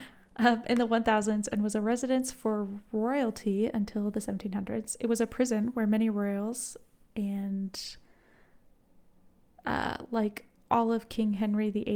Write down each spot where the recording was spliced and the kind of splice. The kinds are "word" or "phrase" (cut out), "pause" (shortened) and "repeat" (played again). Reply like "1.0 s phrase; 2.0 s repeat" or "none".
none